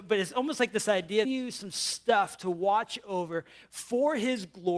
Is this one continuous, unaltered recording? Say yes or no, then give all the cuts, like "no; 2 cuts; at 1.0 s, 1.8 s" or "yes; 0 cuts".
no; 1 cut; at 1.2 s